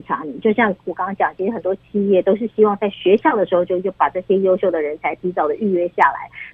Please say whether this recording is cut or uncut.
uncut